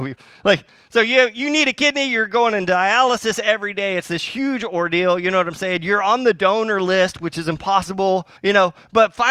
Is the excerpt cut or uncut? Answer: cut